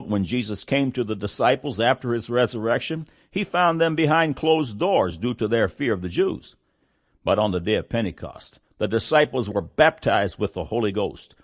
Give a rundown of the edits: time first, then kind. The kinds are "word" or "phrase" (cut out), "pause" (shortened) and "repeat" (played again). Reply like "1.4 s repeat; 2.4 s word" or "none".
none